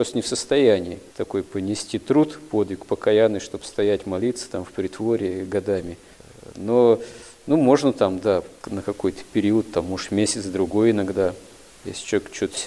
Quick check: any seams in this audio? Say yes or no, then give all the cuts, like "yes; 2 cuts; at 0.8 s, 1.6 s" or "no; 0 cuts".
yes; 2 cuts; at 1.1 s, 8.6 s